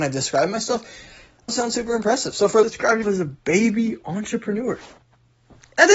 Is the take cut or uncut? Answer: cut